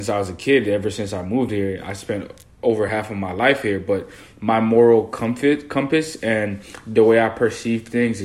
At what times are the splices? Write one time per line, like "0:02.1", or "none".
none